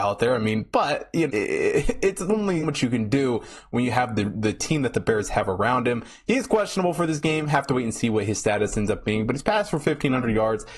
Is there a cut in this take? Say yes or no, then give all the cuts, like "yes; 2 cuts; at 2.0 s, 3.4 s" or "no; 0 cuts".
yes; 2 cuts; at 1.3 s, 2.6 s